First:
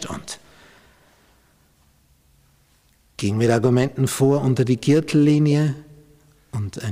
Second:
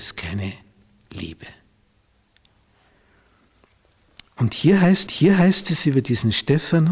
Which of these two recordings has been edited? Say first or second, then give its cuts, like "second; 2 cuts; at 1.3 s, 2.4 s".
second; 1 cut; at 5.1 s